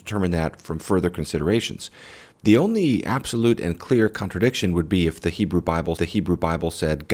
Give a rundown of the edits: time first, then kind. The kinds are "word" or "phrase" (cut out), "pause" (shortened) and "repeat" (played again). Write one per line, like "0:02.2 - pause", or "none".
0:02.3 - pause
0:06.0 - repeat